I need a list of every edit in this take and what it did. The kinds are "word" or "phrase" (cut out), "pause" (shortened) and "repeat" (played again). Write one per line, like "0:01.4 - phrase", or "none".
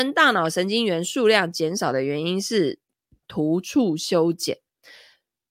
0:03.2 - word

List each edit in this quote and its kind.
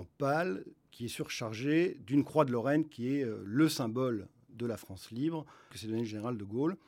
0:05.7 - phrase

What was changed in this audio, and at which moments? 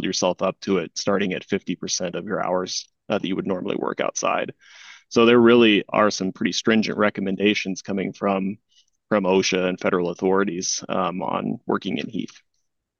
none

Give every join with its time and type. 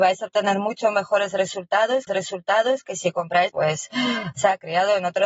0:02.1 - repeat
0:03.5 - phrase

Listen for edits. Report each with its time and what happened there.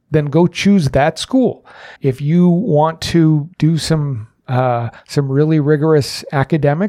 0:02.0 - pause
0:03.5 - pause
0:05.0 - pause

